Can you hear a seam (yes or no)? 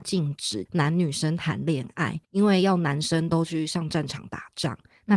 yes